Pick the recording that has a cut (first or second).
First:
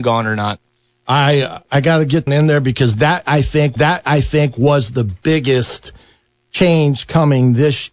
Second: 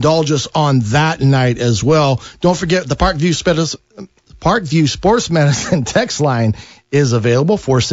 first